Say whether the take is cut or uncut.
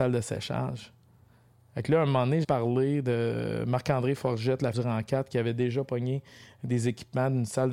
cut